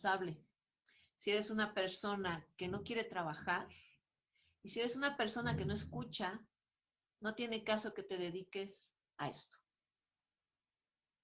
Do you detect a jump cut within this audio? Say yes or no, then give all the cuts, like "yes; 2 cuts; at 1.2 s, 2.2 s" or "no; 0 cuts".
no; 0 cuts